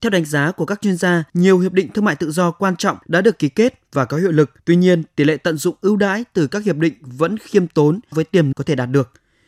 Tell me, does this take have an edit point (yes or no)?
yes